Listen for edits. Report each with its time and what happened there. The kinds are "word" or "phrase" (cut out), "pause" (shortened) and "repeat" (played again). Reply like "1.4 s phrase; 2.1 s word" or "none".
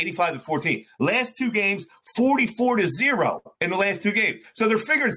3.5 s pause